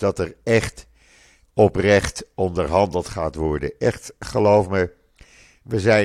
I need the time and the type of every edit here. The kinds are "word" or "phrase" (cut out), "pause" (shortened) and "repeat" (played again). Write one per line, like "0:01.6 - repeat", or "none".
none